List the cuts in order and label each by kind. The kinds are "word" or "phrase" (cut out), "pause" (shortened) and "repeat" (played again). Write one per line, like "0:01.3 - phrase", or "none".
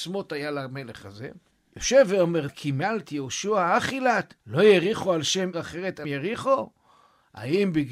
0:01.5 - pause
0:02.5 - word
0:04.4 - pause
0:05.5 - phrase
0:06.0 - word